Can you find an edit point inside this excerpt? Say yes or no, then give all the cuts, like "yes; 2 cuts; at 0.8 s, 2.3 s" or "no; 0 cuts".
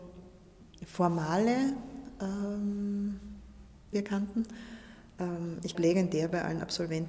yes; 2 cuts; at 3.9 s, 5.7 s